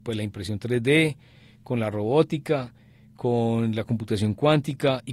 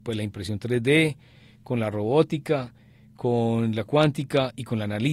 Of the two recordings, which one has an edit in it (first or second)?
second